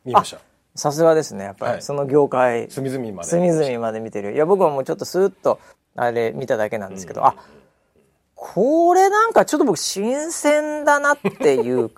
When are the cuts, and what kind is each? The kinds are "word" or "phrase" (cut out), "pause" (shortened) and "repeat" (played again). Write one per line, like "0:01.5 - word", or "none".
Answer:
0:05.7 - pause